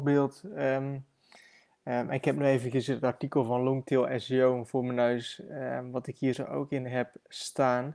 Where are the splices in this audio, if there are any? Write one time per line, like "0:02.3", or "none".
none